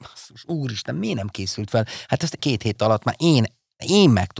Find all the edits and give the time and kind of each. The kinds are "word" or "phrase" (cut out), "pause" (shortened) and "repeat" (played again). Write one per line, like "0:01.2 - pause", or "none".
0:02.4 - phrase

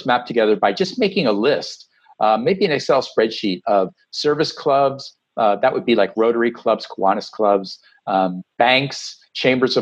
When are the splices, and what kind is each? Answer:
0:08.5 - pause

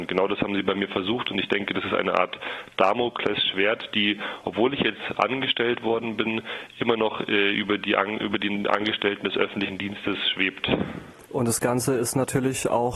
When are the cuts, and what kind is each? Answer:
0:11.3 - pause

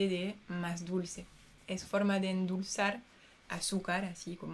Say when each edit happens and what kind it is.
0:01.8 - word
0:03.5 - word

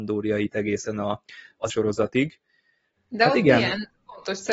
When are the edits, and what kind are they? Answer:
0:01.7 - word

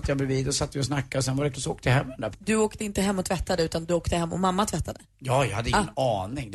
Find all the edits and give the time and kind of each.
0:01.5 - word
0:02.3 - word

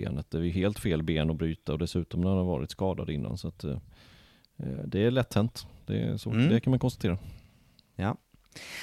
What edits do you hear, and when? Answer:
none

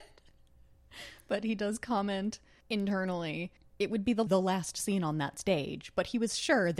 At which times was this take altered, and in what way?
0:03.6 - pause
0:04.3 - phrase

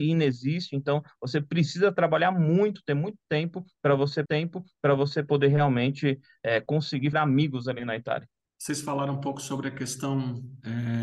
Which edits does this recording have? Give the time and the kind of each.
0:04.3 - repeat
0:07.1 - word
0:08.4 - pause

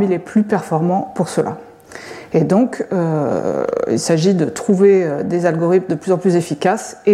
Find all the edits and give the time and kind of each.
none

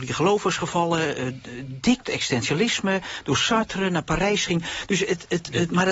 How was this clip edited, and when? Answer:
0:02.0 - phrase

